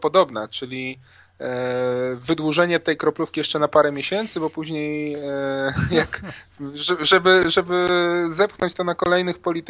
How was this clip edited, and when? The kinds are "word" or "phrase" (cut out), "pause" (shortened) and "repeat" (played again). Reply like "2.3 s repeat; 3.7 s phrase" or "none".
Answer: none